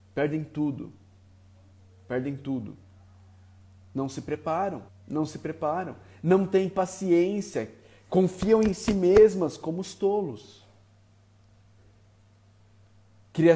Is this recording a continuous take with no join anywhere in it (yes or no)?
no